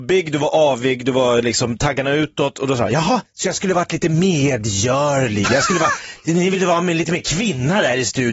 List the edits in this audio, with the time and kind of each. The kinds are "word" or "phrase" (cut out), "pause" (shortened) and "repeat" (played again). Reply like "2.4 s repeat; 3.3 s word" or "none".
3.2 s pause